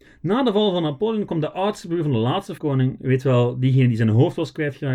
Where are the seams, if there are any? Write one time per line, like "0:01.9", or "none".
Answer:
0:02.6